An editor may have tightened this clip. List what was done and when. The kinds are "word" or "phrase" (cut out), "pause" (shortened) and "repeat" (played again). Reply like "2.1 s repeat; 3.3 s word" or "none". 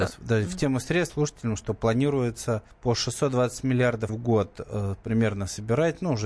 1.1 s phrase; 2.7 s pause; 4.1 s word